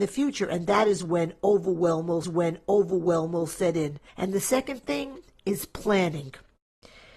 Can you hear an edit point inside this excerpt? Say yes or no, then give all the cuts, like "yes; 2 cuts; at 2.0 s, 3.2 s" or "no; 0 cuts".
yes; 2 cuts; at 2.2 s, 4.1 s